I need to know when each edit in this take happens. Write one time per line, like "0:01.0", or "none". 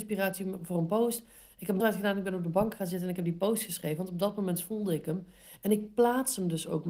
0:01.8